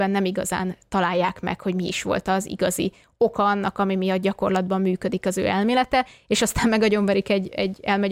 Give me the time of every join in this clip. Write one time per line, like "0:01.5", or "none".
none